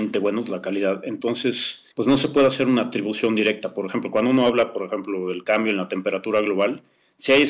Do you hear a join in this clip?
yes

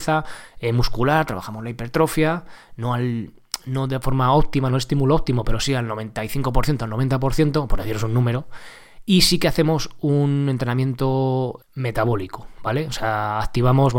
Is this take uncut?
no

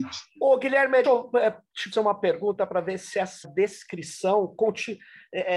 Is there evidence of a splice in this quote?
yes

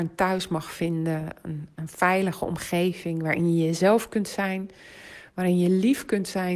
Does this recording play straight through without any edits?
yes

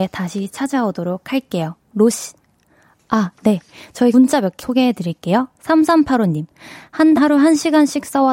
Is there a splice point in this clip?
yes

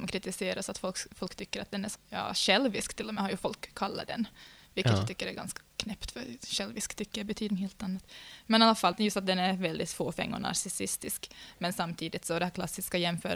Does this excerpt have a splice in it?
yes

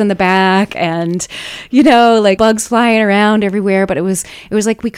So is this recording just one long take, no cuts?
no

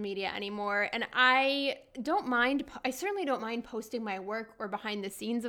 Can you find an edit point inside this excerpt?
no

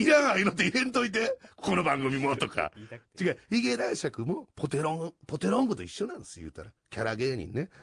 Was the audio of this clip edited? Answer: yes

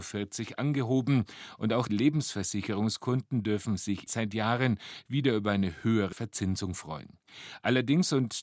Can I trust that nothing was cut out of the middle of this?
no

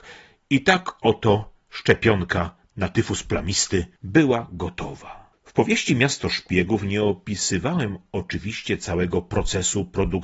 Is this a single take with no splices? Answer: yes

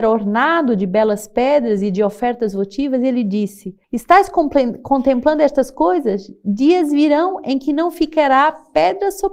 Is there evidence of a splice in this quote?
yes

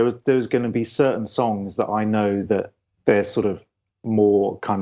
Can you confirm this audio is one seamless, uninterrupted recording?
yes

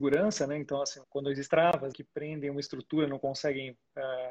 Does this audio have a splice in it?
yes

